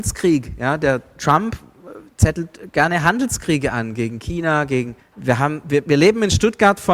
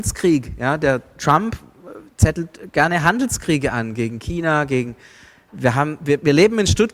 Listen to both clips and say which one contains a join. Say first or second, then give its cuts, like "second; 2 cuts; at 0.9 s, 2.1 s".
first; 1 cut; at 5.0 s